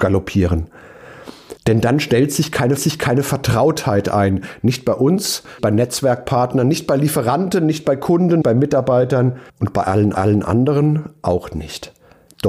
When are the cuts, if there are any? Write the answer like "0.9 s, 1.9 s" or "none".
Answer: 1.6 s, 2.8 s, 5.6 s, 8.4 s, 9.5 s, 10.1 s